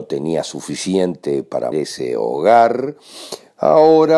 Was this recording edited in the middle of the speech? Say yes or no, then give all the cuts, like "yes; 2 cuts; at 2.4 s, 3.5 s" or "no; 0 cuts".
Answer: yes; 1 cut; at 1.7 s